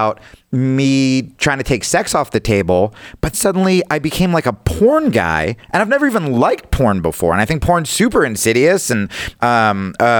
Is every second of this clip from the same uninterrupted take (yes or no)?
no